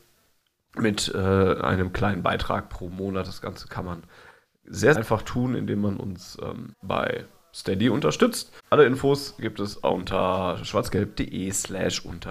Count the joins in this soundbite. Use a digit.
3